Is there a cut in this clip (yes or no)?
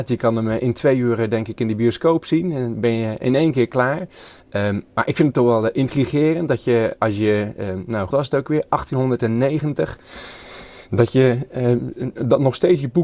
yes